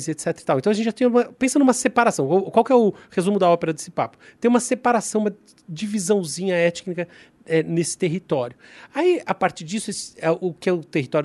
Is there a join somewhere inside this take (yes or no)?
no